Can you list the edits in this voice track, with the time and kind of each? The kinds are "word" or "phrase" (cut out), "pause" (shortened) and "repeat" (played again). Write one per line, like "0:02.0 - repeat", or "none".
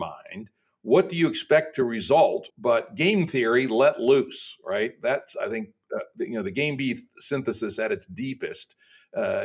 0:02.5 - pause

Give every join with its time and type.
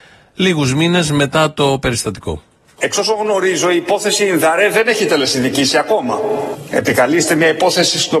none

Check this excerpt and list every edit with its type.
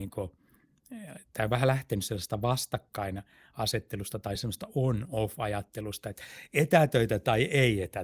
none

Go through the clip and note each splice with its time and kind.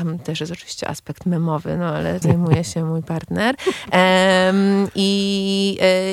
0:02.2 - word

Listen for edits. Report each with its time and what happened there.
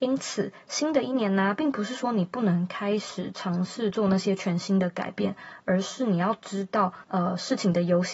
0:07.0 - pause

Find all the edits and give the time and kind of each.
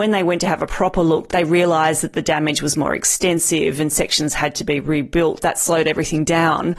0:05.4 - word

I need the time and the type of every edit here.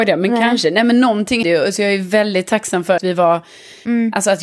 0:01.4 - word
0:03.0 - word

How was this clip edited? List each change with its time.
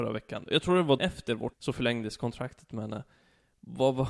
0:01.0 - word
0:01.5 - word

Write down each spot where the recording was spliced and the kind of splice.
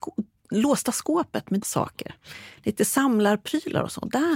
0:01.6 - word

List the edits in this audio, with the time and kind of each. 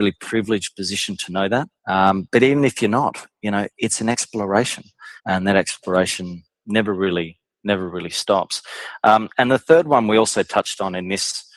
0:01.8 - pause
0:05.2 - pause

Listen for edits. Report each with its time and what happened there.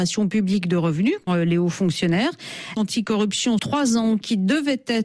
0:01.3 - word
0:02.8 - phrase
0:03.6 - word

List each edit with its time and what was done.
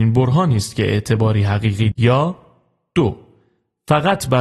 0:01.9 - word

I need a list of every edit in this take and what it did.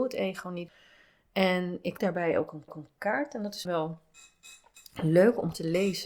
0:02.0 - word
0:02.7 - repeat
0:03.7 - word

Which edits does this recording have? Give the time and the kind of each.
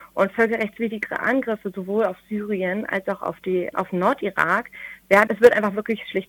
0:03.7 - word
0:05.3 - word

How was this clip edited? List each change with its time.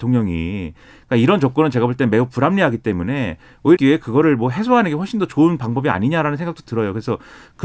0:03.8 - word

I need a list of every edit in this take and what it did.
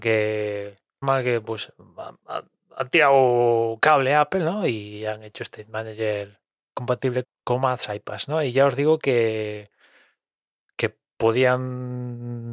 0:01.0 - word
0:07.2 - word

